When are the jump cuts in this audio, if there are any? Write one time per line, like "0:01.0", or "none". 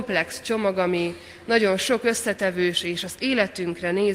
0:03.2